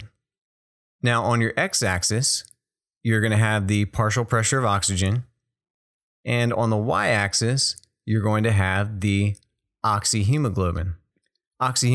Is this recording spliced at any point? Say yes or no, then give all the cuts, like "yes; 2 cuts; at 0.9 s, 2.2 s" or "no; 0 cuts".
no; 0 cuts